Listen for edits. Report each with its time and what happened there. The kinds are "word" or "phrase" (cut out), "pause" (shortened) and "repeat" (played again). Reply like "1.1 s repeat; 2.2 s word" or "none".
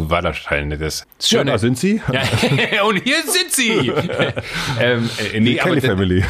1.0 s word